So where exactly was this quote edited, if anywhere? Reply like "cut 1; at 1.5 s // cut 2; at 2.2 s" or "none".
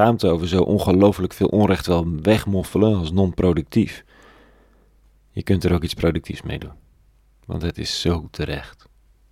none